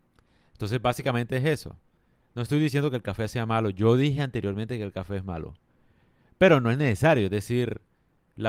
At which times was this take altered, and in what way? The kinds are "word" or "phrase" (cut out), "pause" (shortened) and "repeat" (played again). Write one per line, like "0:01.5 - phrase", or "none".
none